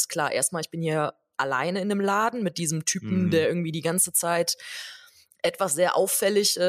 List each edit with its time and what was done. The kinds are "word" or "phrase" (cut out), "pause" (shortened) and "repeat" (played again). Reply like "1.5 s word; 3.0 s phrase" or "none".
none